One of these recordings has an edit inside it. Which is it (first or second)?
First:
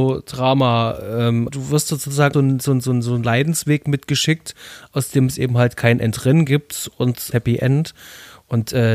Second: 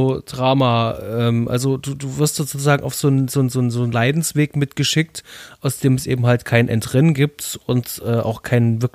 first